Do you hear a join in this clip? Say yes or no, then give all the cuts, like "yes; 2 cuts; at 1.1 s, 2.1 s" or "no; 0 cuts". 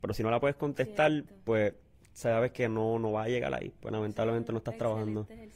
no; 0 cuts